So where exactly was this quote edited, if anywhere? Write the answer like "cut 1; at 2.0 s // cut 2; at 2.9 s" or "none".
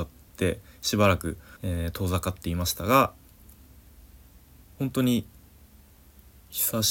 cut 1; at 1.6 s